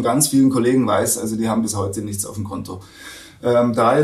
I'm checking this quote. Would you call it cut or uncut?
uncut